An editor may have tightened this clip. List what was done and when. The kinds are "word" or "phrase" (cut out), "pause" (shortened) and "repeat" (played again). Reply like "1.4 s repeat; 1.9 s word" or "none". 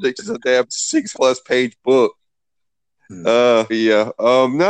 1.1 s word; 3.7 s word